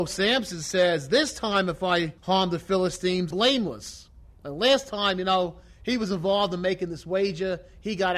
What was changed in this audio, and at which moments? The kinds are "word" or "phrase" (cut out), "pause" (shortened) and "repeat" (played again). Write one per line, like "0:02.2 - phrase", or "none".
0:02.2 - pause
0:03.3 - word